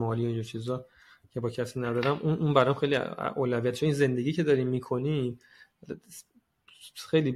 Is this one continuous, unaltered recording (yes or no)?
yes